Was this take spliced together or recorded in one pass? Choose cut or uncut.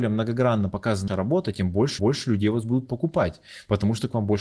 cut